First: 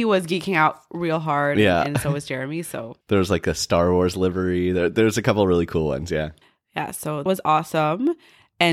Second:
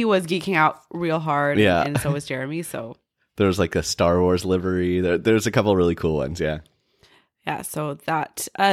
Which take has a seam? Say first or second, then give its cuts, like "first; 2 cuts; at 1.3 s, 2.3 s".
first; 3 cuts; at 3.0 s, 6.4 s, 7.3 s